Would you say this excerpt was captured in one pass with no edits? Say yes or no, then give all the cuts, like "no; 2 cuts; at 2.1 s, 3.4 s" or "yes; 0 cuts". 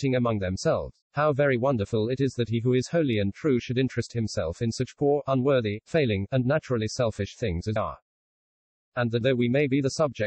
no; 3 cuts; at 1.0 s, 7.8 s, 9.2 s